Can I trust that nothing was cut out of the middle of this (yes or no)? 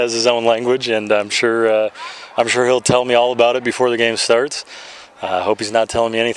yes